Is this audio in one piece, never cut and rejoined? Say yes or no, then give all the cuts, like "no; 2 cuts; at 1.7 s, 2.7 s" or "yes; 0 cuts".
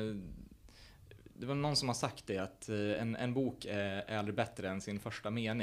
yes; 0 cuts